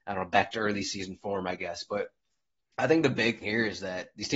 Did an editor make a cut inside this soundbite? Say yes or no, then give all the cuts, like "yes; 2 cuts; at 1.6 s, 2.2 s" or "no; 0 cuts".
yes; 1 cut; at 3.4 s